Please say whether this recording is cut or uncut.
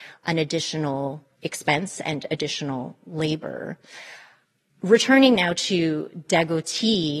uncut